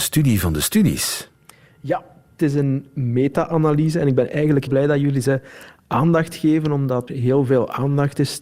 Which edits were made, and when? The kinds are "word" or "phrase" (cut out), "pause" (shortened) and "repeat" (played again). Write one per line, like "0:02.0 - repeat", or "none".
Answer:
0:04.7 - word
0:07.1 - word